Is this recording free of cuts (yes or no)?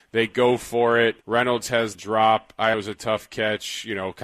no